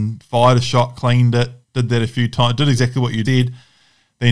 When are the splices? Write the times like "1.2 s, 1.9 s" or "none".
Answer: 1.6 s, 3.2 s